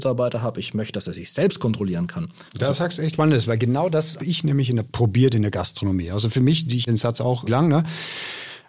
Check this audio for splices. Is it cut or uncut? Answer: cut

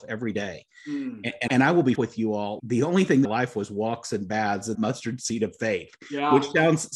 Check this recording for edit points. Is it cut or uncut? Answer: cut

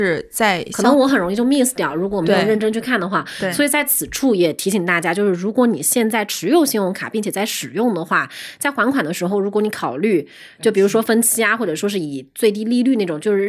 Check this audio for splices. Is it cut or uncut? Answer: uncut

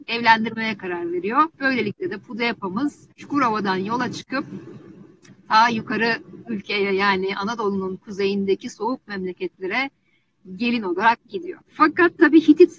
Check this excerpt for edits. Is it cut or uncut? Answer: cut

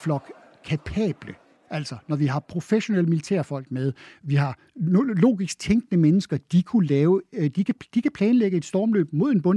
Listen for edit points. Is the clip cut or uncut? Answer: uncut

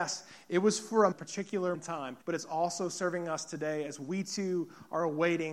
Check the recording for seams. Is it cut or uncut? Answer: cut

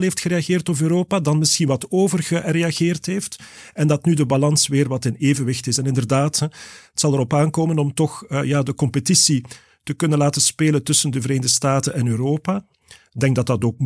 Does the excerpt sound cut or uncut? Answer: uncut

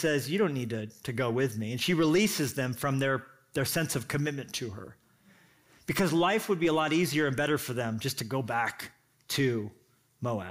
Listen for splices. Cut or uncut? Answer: uncut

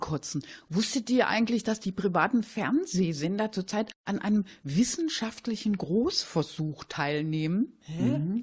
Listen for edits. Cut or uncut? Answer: uncut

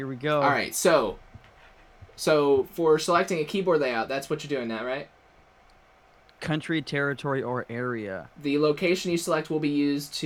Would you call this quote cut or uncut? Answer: uncut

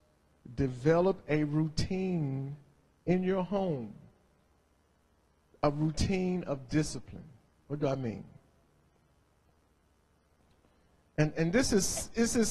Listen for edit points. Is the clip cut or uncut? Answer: uncut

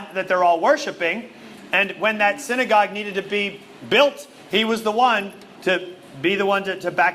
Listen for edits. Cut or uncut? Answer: uncut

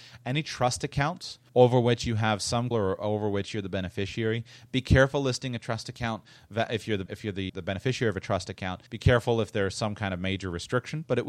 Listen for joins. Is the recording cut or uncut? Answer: cut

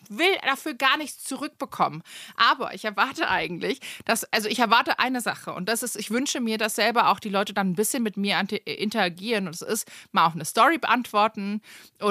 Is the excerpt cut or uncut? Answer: uncut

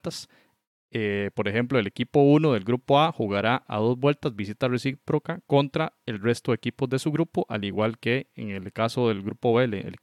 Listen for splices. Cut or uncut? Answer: uncut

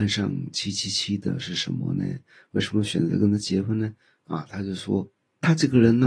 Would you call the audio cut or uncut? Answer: uncut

